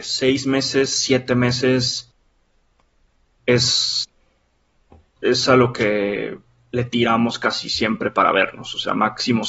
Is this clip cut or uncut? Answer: uncut